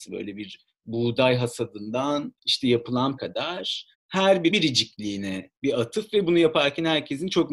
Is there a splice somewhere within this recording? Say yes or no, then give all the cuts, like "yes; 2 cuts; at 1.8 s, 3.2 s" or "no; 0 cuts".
yes; 5 cuts; at 2.4 s, 3.2 s, 3.9 s, 4.5 s, 5.6 s